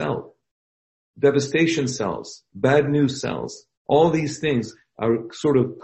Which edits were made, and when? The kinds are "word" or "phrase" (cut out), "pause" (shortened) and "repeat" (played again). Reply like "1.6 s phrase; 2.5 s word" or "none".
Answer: 3.8 s pause